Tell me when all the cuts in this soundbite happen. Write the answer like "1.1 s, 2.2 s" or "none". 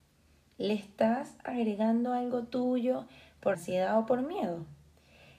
3.5 s